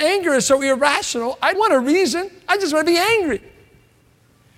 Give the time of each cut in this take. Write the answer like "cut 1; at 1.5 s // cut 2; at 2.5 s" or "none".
cut 1; at 1.6 s